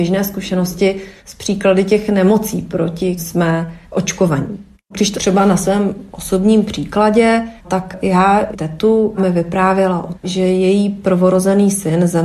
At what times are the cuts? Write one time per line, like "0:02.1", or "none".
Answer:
0:01.2
0:03.2
0:03.8
0:05.1
0:07.6
0:08.5
0:09.2
0:10.1